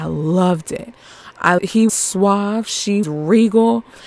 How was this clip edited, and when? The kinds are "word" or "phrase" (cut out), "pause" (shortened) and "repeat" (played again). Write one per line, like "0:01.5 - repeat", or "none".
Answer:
0:01.6 - word
0:01.9 - word
0:03.0 - word